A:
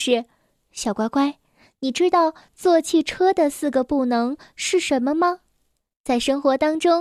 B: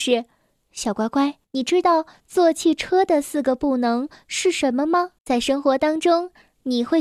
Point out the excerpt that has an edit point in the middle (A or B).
B